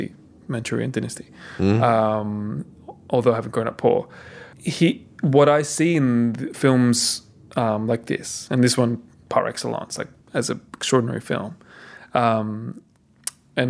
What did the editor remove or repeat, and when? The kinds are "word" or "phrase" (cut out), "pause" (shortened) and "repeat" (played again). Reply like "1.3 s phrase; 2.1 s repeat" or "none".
4.5 s pause; 10.2 s pause